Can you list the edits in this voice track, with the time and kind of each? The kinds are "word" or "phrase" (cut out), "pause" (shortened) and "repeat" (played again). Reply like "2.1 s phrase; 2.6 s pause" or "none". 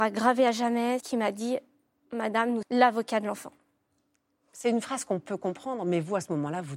1.0 s word; 2.6 s word